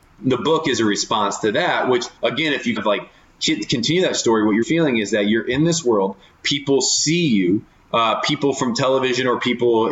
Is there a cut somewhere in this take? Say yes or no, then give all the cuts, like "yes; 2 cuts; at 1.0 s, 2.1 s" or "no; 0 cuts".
yes; 4 cuts; at 2.2 s, 2.8 s, 3.3 s, 4.6 s